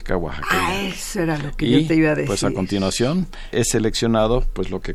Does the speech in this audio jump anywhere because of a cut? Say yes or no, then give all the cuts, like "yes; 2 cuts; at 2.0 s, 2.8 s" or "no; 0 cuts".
yes; 1 cut; at 3.5 s